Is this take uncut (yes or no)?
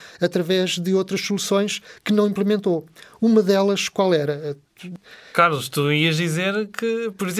yes